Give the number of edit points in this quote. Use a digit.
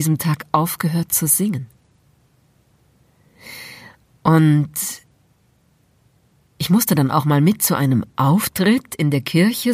0